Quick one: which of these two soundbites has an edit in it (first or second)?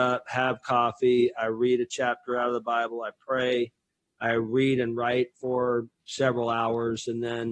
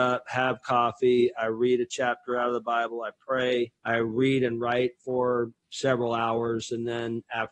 second